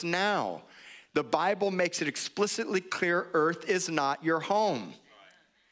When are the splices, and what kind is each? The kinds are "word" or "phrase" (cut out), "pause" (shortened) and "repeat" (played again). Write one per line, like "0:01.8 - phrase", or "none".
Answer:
none